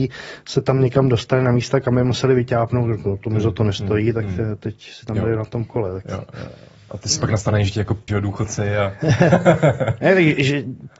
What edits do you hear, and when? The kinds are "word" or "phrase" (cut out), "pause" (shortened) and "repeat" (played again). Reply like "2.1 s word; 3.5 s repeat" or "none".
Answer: 8.1 s word